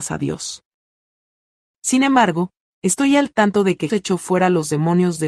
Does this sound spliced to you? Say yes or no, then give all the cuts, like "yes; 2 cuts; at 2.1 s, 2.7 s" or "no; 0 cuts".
yes; 1 cut; at 3.9 s